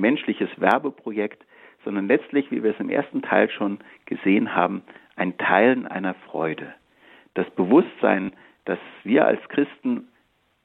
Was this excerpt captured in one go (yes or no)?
yes